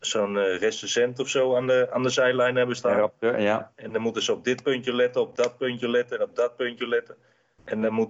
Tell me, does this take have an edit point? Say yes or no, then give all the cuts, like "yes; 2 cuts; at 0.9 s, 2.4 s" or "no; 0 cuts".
no; 0 cuts